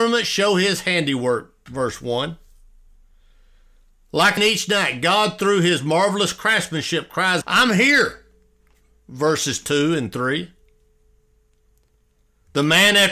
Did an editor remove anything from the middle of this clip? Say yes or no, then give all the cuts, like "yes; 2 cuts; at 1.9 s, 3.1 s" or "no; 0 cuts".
yes; 2 cuts; at 4.4 s, 7.4 s